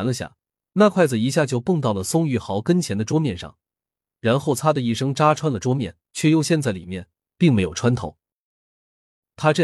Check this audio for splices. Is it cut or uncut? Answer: cut